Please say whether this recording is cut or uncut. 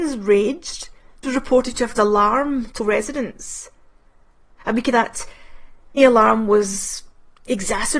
cut